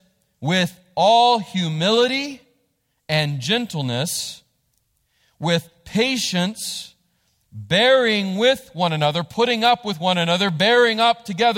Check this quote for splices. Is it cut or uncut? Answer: uncut